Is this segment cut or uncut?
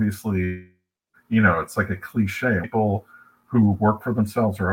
cut